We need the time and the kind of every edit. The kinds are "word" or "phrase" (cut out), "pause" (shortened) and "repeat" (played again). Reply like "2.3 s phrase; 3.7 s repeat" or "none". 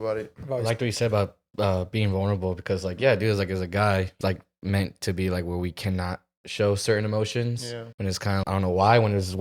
4.2 s phrase; 7.9 s pause; 8.4 s word